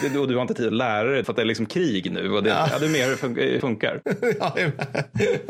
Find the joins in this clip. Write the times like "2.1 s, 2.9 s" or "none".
1.2 s, 3.6 s